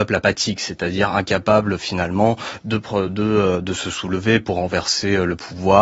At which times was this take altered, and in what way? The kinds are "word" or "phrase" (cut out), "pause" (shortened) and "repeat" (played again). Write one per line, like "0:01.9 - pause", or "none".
none